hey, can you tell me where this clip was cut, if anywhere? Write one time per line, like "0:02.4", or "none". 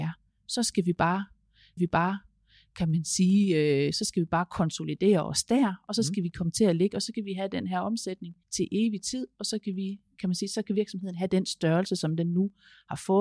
0:01.8
0:08.4